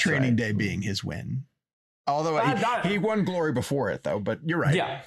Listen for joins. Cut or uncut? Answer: uncut